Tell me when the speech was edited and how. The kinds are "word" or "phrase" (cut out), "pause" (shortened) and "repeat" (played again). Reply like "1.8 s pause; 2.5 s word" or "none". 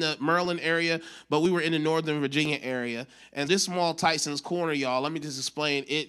3.5 s word